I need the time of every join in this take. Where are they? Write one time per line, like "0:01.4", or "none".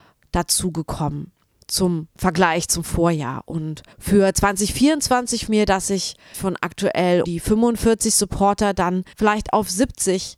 0:03.9
0:05.5
0:06.3
0:07.2
0:09.1